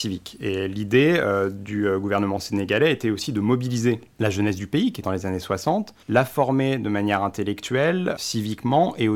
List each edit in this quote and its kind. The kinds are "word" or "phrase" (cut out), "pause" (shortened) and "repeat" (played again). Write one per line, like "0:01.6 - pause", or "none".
0:05.0 - phrase
0:06.0 - pause